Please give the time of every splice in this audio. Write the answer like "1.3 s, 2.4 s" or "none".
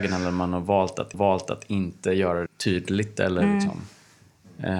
1.1 s, 2.5 s